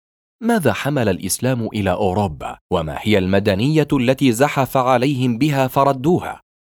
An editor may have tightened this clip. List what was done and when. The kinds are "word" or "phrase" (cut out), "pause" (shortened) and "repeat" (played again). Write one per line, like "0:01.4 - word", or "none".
0:02.6 - pause